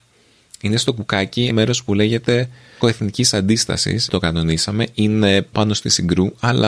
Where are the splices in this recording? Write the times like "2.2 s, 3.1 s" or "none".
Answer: 1.5 s, 2.8 s, 4.1 s, 5.5 s